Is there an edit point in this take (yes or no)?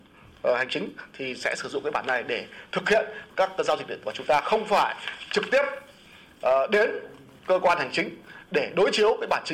yes